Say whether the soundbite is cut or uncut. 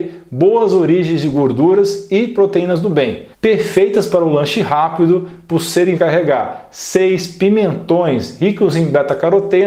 cut